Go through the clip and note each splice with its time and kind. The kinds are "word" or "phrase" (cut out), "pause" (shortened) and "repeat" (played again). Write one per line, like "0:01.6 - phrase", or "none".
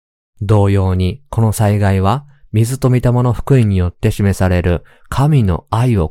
none